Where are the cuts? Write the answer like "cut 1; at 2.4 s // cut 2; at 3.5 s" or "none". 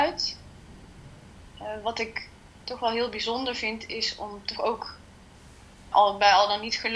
cut 1; at 5.9 s

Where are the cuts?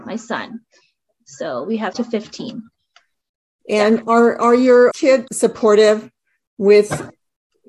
cut 1; at 1.9 s // cut 2; at 4.9 s // cut 3; at 5.3 s

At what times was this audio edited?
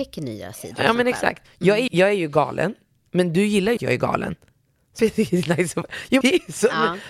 cut 1; at 1.9 s // cut 2; at 3.8 s // cut 3; at 5.0 s // cut 4; at 6.2 s

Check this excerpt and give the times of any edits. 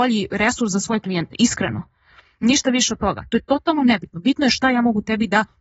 none

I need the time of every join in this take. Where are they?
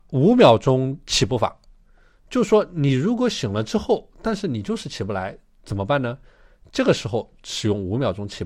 none

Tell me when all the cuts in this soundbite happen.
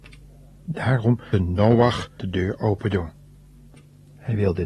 cut 1; at 1.3 s // cut 2; at 2.2 s

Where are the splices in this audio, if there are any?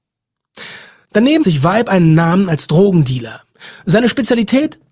cut 1; at 1.4 s

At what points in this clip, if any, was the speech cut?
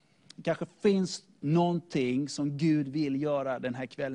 none

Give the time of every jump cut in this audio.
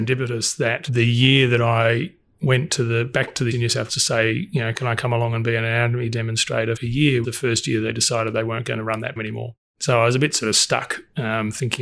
cut 1; at 3.5 s // cut 2; at 3.9 s // cut 3; at 6.8 s // cut 4; at 7.2 s // cut 5; at 9.2 s

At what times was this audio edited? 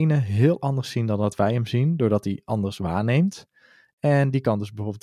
none

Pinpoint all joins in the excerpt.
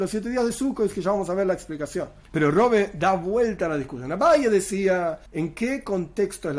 cut 1; at 2.2 s // cut 2; at 5.3 s

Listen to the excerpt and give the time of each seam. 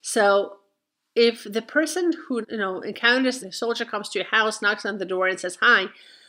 cut 1; at 2.4 s // cut 2; at 3.4 s

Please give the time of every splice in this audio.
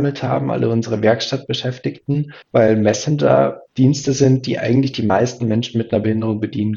cut 1; at 2.4 s // cut 2; at 3.7 s

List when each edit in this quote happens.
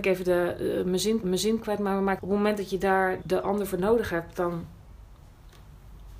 cut 1; at 1.2 s // cut 2; at 2.2 s // cut 3; at 3.2 s

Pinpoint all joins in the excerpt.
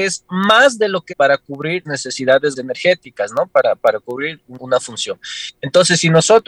cut 1; at 1.1 s // cut 2; at 1.9 s // cut 3; at 2.6 s // cut 4; at 4.6 s

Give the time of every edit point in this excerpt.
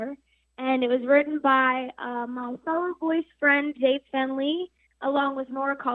none

